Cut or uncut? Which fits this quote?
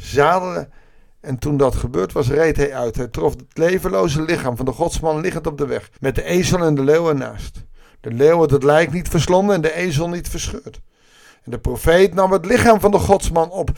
cut